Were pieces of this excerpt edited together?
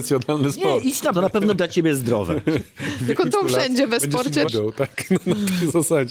yes; 4 cuts; at 1.1 s, 1.5 s, 3.3 s, 4.4 s

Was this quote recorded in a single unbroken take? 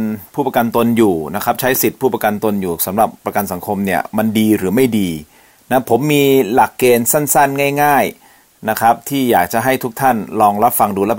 yes; 0 cuts

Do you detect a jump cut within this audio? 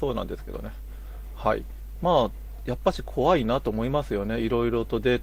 no; 0 cuts

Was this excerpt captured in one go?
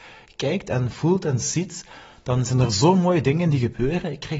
yes; 0 cuts

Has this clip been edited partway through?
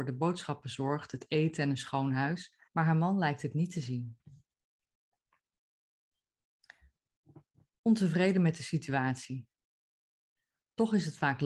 yes; 1 cut; at 2.7 s

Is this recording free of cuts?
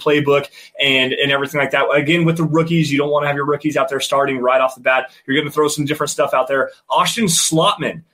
yes; 0 cuts

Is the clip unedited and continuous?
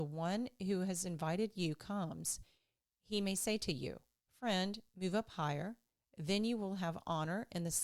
yes; 0 cuts

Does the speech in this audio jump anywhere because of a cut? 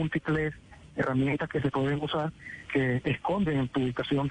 yes; 1 cut; at 2.7 s

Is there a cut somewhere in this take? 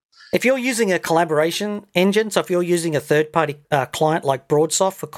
yes; 1 cut; at 3.6 s

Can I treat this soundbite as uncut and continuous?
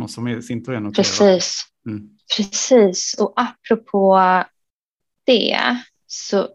yes; 0 cuts

